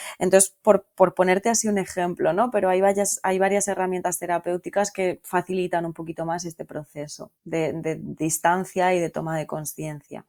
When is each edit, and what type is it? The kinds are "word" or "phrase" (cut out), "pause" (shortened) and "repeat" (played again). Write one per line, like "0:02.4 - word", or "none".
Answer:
0:07.4 - pause